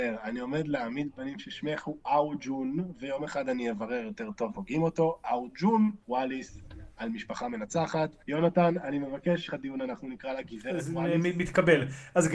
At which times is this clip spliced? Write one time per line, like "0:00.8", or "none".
0:04.5
0:06.0
0:08.2
0:09.5